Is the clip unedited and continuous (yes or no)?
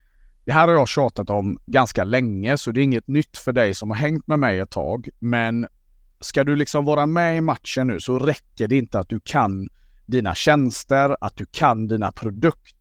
yes